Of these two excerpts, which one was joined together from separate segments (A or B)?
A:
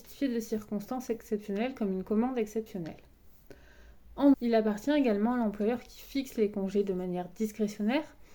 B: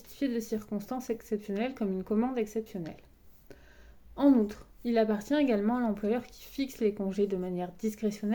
A